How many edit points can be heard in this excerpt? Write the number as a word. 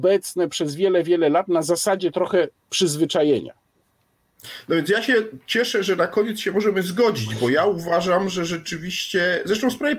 zero